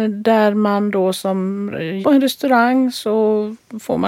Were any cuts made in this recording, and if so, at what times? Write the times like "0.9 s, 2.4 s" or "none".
2.0 s